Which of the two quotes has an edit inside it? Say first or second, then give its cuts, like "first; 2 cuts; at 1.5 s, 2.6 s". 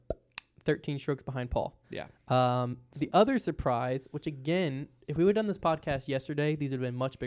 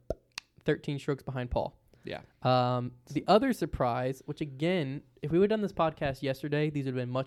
first; 1 cut; at 1.8 s